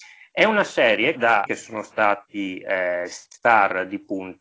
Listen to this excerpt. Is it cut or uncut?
cut